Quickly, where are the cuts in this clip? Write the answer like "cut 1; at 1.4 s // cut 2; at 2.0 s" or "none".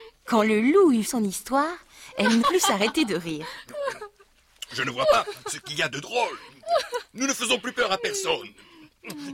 cut 1; at 1.0 s // cut 2; at 2.4 s